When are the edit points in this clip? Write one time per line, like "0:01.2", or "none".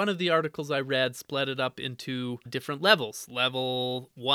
0:02.5